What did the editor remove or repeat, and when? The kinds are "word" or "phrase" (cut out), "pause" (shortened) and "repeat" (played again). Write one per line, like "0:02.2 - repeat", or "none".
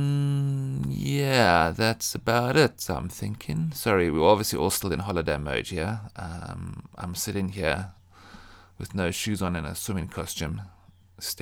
none